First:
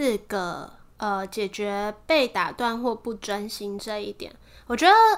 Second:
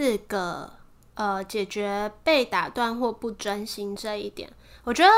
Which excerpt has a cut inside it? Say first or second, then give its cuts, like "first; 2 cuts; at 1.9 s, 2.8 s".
first; 1 cut; at 0.9 s